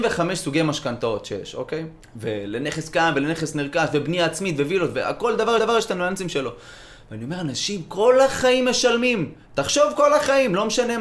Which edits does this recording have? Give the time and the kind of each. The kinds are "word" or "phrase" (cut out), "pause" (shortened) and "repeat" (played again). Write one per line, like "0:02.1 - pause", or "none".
0:02.0 - pause
0:05.6 - repeat